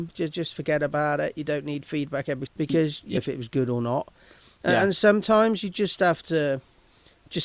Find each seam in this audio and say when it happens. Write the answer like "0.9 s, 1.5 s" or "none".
2.5 s, 3.2 s